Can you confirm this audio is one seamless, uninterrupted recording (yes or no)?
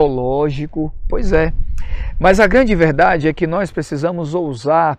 yes